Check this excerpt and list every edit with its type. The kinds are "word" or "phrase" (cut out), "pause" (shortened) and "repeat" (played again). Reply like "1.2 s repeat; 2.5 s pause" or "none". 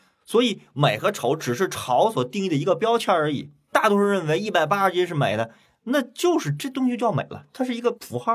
none